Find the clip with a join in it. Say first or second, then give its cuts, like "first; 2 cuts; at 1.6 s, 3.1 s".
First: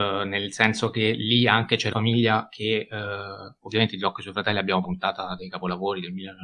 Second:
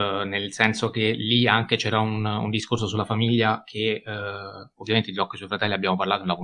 first; 2 cuts; at 1.9 s, 4.8 s